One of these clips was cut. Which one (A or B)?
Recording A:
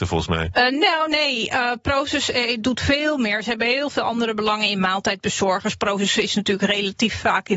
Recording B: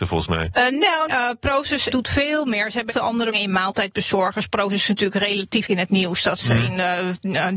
B